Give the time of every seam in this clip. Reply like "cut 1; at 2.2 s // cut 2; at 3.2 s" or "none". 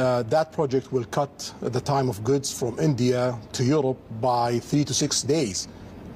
none